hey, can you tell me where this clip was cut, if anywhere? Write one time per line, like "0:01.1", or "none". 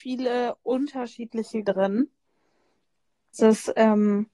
0:01.6
0:03.3